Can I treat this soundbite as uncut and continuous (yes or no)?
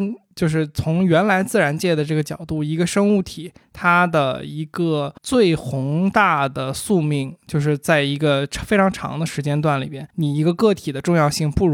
no